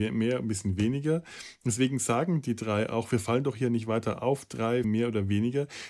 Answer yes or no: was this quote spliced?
yes